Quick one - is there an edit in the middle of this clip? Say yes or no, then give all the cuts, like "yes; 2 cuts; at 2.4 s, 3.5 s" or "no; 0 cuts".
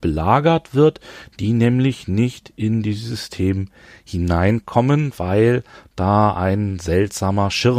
no; 0 cuts